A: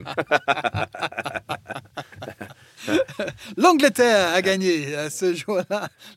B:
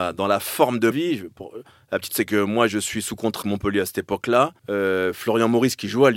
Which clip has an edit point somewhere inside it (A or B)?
B